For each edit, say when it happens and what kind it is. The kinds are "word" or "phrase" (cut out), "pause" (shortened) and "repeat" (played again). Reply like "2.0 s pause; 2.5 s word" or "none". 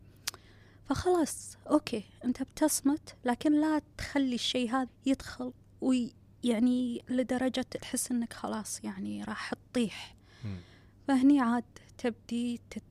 4.9 s word; 7.1 s word; 7.8 s word